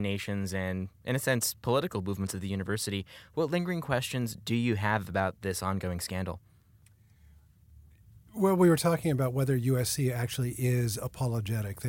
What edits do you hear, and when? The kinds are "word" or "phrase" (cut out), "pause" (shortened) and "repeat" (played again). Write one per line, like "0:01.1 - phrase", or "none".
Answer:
none